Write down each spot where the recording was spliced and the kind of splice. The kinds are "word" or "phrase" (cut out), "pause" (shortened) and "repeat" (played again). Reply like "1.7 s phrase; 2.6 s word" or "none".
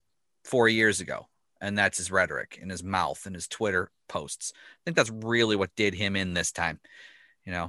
none